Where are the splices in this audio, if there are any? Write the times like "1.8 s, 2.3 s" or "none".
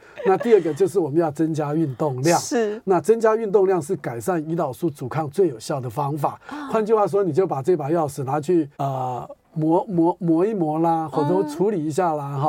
8.7 s